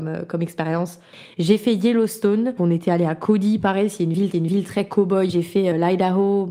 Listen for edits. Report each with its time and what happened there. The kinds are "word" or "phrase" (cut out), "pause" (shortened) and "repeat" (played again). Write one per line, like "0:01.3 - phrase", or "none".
0:02.6 - word
0:04.3 - repeat